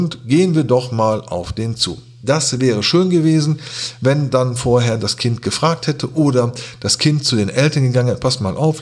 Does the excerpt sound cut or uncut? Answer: uncut